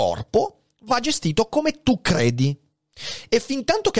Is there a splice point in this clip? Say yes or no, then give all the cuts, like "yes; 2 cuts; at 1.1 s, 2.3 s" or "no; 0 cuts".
no; 0 cuts